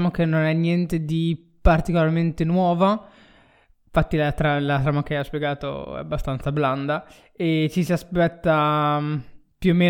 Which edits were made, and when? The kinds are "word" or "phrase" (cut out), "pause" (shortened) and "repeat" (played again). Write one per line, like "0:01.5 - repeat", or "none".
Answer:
none